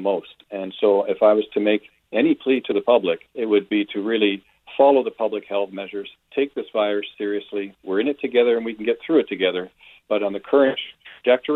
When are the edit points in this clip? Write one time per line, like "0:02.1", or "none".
0:03.3